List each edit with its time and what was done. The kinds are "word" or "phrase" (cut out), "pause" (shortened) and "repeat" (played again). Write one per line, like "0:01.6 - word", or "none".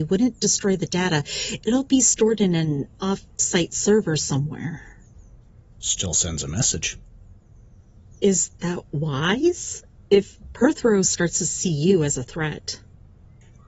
none